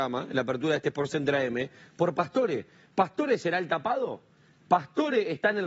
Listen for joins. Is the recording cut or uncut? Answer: uncut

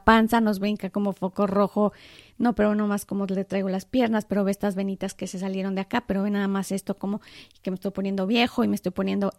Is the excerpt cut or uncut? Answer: uncut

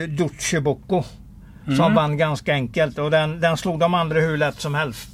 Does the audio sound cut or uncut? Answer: uncut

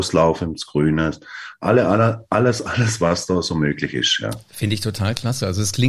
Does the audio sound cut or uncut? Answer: uncut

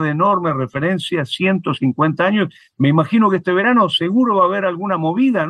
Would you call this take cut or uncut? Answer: uncut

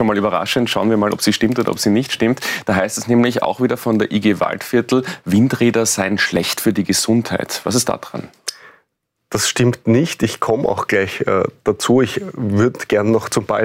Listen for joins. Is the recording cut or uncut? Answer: uncut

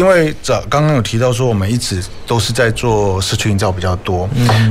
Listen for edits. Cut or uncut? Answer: uncut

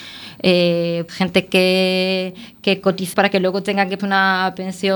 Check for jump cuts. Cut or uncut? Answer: cut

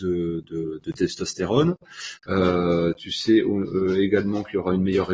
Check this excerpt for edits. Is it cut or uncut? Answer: cut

